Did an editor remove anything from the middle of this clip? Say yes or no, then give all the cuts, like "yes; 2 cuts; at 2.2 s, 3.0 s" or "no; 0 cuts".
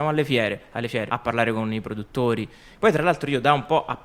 yes; 1 cut; at 1.1 s